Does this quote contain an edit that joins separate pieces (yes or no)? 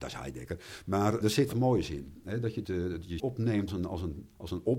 yes